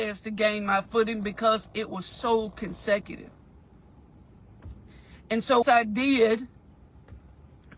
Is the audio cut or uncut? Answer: cut